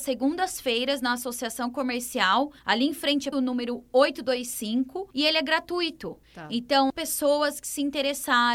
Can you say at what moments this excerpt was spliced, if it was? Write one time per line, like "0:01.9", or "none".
0:02.6
0:03.3
0:05.1
0:06.2
0:06.9